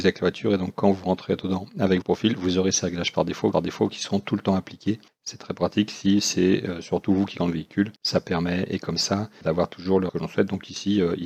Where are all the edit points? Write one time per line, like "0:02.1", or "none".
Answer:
0:02.0
0:03.5
0:05.1
0:07.4
0:08.0
0:09.4
0:10.1